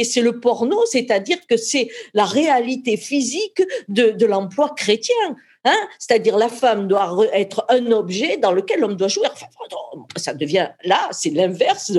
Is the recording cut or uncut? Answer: uncut